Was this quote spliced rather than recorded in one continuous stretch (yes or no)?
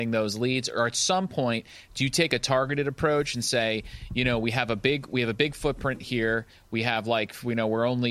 no